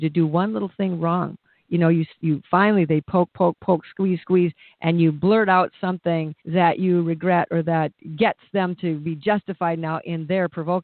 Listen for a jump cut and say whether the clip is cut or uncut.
cut